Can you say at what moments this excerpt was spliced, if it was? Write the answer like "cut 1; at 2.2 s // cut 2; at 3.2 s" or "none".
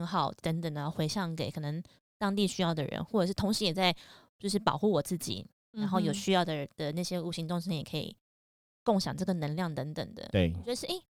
none